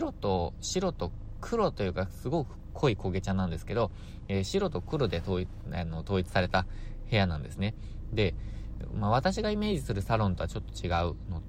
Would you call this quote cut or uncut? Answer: cut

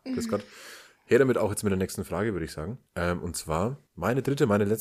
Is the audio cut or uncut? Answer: cut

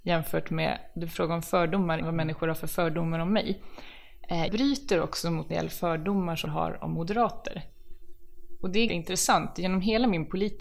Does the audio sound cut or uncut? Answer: cut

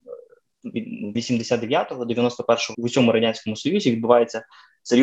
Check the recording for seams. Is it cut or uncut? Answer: cut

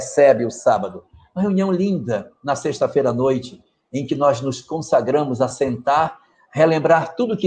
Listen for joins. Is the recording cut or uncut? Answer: uncut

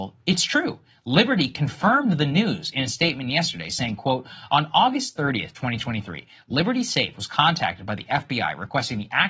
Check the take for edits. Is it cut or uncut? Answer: uncut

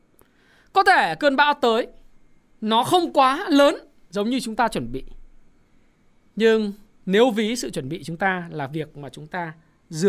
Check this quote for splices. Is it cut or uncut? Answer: uncut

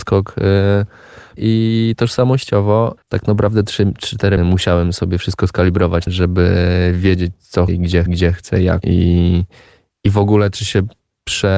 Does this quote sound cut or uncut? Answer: cut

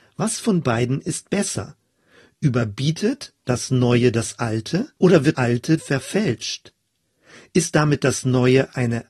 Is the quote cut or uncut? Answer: cut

